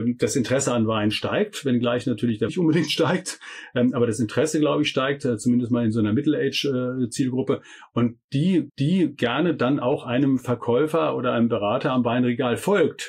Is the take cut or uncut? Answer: cut